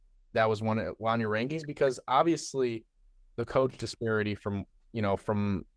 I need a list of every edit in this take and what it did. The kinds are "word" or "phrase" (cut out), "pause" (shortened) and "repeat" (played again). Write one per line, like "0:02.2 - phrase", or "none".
none